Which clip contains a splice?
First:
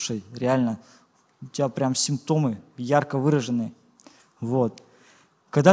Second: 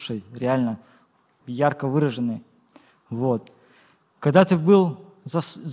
second; 1 cut; at 1.4 s

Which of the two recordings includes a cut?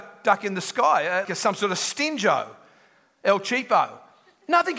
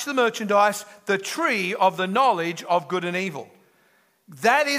first; 1 cut; at 1.2 s

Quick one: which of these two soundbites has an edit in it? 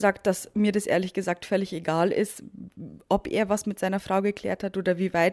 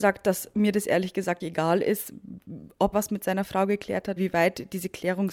second; 3 cuts; at 1.4 s, 2.9 s, 4.2 s

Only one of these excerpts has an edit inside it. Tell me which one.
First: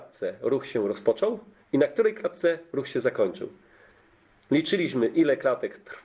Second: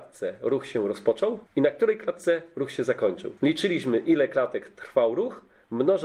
second; 2 cuts; at 1.5 s, 3.4 s

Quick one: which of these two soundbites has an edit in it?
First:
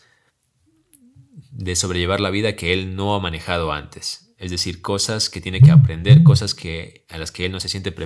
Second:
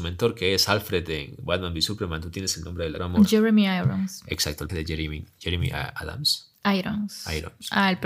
second; 2 cuts; at 3.0 s, 4.7 s

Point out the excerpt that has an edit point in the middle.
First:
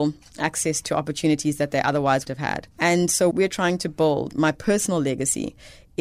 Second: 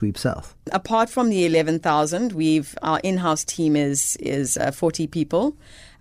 first; 4 cuts; at 2.3 s, 2.7 s, 3.3 s, 4.3 s

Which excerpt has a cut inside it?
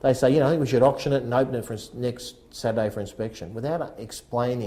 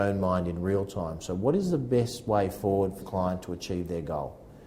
second; 1 cut; at 3.0 s

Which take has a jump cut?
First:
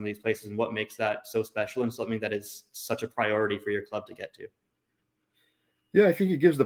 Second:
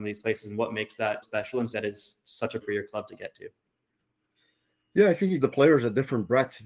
second; 4 cuts; at 1.2 s, 1.7 s, 2.6 s, 5.4 s

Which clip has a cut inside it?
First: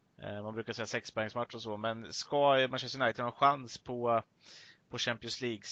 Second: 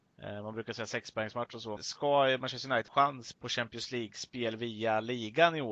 second; 3 cuts; at 1.8 s, 2.9 s, 3.3 s

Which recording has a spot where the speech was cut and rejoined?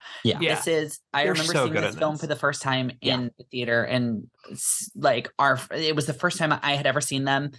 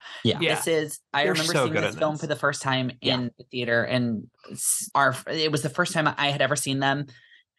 second; 1 cut; at 4.9 s

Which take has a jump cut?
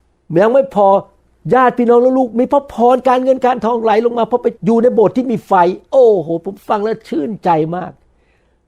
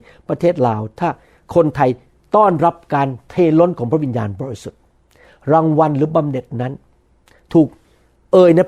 first; 1 cut; at 4.6 s

